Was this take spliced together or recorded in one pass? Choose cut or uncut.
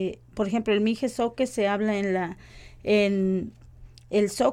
uncut